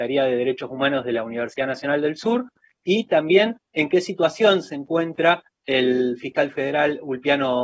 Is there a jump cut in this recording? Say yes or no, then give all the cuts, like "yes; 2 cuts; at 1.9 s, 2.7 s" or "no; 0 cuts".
no; 0 cuts